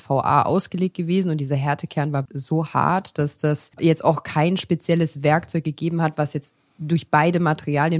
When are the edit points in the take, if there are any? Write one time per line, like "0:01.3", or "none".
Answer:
0:02.3
0:03.7